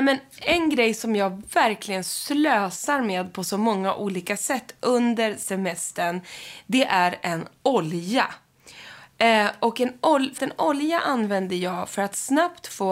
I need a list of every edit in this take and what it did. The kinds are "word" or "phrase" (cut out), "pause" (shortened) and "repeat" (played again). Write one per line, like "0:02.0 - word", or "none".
0:10.4 - word